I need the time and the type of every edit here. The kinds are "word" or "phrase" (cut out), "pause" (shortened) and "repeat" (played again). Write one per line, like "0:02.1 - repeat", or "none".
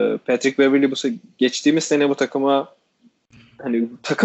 none